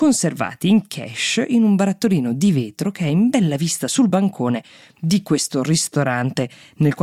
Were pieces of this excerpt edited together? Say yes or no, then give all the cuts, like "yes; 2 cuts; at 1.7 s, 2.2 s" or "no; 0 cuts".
no; 0 cuts